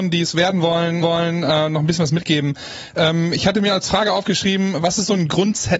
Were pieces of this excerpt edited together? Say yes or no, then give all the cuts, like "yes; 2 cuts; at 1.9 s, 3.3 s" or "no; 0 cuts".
yes; 1 cut; at 1.0 s